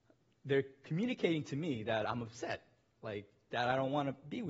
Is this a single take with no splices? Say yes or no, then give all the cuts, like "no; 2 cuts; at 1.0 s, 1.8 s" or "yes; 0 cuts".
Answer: yes; 0 cuts